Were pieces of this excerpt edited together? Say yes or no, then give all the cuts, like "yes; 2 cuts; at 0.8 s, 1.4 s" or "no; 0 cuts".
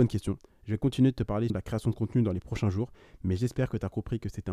yes; 1 cut; at 1.5 s